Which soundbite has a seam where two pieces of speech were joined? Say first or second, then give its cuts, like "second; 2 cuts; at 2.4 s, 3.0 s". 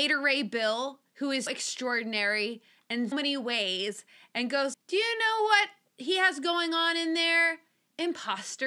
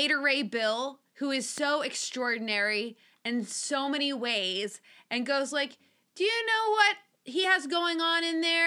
first; 3 cuts; at 1.5 s, 3.1 s, 4.7 s